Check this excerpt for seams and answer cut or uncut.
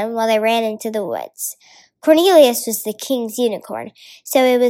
uncut